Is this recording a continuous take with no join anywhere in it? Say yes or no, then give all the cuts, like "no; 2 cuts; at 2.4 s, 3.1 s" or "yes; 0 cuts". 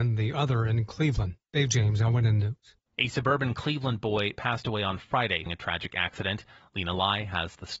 no; 2 cuts; at 2.9 s, 5.5 s